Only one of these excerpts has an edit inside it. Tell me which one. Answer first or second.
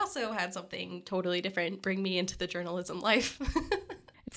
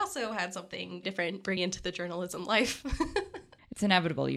second